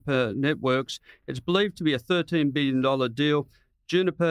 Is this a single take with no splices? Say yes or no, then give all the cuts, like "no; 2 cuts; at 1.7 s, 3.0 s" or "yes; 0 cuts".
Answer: yes; 0 cuts